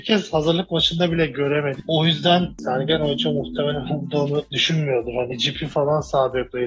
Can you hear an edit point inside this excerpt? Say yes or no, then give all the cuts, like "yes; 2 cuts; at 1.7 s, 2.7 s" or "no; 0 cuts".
no; 0 cuts